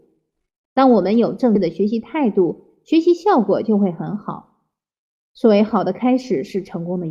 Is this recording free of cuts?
yes; 0 cuts

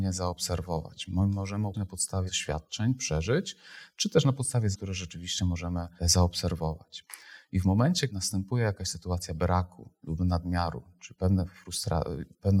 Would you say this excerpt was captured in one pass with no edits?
no; 5 cuts; at 1.7 s, 2.3 s, 4.7 s, 6.0 s, 8.1 s

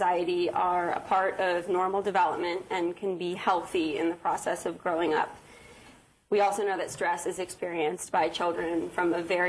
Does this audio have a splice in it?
no; 0 cuts

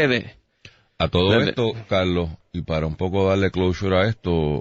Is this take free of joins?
yes; 0 cuts

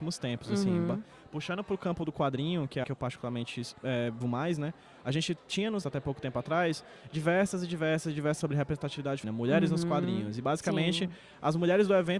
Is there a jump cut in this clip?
yes; 5 cuts; at 2.8 s, 4.2 s, 5.8 s, 8.4 s, 9.2 s

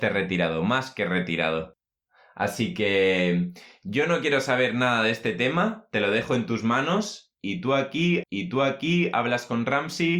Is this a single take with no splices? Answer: no; 1 cut; at 8.2 s

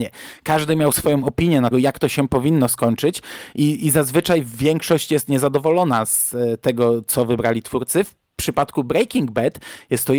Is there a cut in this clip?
yes; 1 cut; at 1.7 s

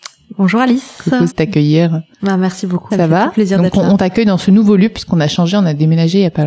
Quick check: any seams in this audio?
yes; 3 cuts; at 1.3 s, 2.1 s, 2.9 s

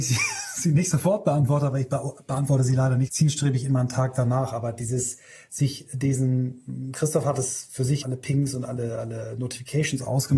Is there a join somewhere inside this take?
yes; 2 cuts; at 3.1 s, 8.0 s

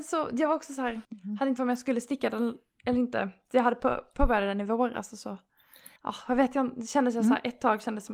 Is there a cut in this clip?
yes; 3 cuts; at 1.0 s, 1.6 s, 6.0 s

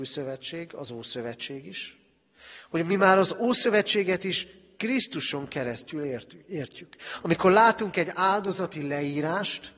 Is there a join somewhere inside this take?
no; 0 cuts

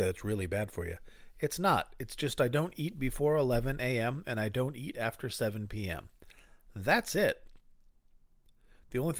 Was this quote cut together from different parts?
no; 0 cuts

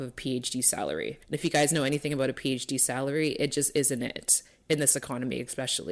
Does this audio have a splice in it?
yes; 1 cut; at 1.2 s

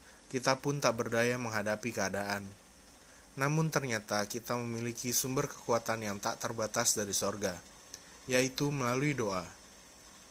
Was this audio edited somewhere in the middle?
no; 0 cuts

